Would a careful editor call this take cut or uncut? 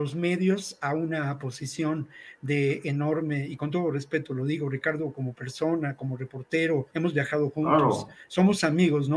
cut